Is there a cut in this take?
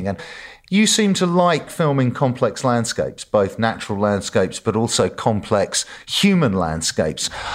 no; 0 cuts

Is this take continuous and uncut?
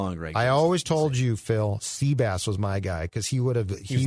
yes; 0 cuts

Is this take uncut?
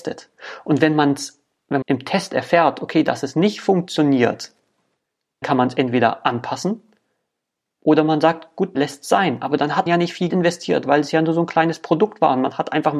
no; 5 cuts; at 1.8 s, 5.4 s, 8.7 s, 9.9 s, 10.3 s

